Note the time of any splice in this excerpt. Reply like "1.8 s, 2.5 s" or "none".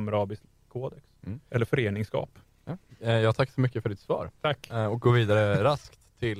1.5 s, 2.9 s, 4.4 s